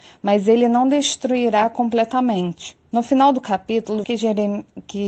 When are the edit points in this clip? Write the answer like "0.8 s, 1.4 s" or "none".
2.9 s, 4.0 s